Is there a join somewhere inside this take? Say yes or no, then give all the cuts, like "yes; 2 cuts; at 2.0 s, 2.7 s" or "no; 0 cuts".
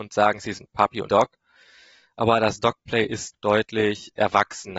yes; 2 cuts; at 1.1 s, 3.3 s